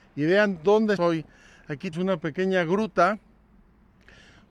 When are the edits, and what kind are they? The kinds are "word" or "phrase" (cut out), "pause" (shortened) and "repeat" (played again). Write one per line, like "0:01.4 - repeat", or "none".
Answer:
0:01.0 - word
0:01.9 - word